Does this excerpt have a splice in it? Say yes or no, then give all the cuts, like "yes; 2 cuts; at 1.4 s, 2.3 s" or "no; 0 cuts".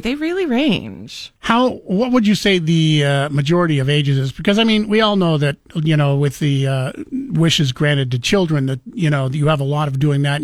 yes; 1 cut; at 1.4 s